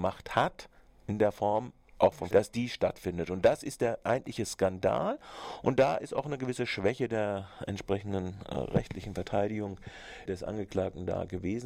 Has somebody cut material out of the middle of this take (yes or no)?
yes